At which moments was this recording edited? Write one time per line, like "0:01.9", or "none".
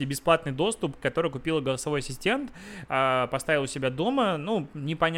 0:01.0